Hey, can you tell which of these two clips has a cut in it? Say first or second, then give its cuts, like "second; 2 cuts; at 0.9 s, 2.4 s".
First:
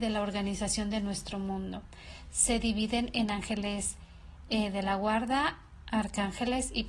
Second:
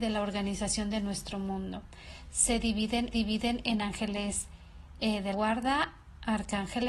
second; 2 cuts; at 3.1 s, 5.3 s